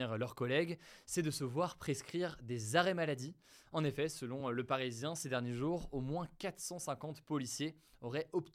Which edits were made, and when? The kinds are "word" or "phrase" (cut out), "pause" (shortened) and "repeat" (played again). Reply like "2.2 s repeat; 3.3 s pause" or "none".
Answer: none